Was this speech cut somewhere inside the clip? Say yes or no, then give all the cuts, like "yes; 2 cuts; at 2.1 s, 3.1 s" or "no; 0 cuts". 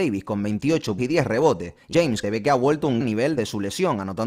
yes; 5 cuts; at 1.0 s, 1.9 s, 2.2 s, 3.0 s, 3.4 s